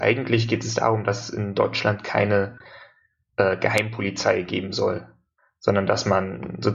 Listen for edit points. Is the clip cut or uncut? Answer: uncut